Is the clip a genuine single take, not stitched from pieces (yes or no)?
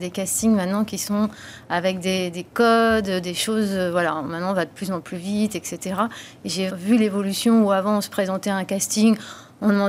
no